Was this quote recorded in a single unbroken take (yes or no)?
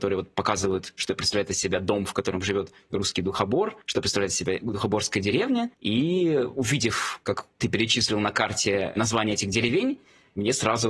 no